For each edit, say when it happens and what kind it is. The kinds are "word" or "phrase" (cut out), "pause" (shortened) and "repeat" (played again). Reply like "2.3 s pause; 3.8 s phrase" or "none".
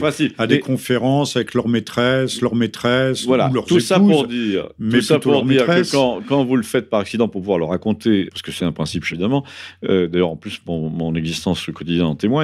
2.4 s repeat; 8.3 s word; 8.6 s phrase; 9.1 s word